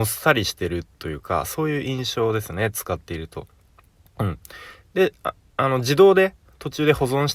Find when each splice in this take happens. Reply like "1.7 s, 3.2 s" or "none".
none